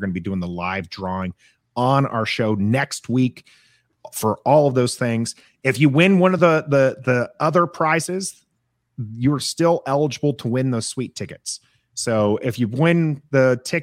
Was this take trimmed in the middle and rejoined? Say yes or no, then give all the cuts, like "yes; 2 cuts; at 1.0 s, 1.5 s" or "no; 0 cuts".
no; 0 cuts